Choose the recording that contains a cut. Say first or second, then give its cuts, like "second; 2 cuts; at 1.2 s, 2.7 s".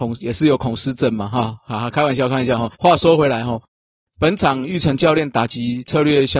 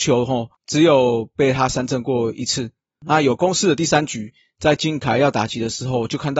first; 1 cut; at 2.7 s